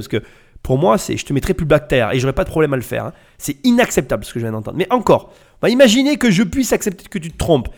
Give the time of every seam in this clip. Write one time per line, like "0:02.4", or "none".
none